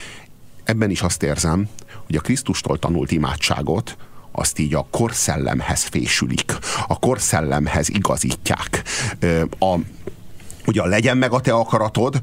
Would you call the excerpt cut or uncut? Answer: uncut